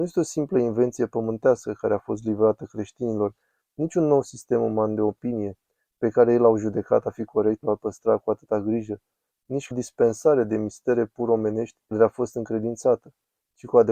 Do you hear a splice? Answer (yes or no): yes